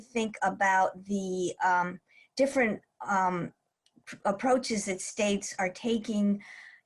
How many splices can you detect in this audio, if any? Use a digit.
0